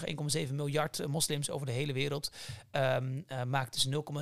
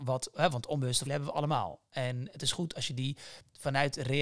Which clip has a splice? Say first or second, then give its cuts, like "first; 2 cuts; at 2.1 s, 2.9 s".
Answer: second; 1 cut; at 1.1 s